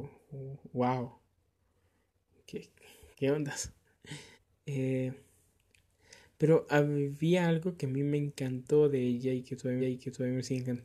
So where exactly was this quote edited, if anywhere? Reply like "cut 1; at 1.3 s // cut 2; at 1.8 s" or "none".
cut 1; at 3.1 s // cut 2; at 4.3 s // cut 3; at 9.8 s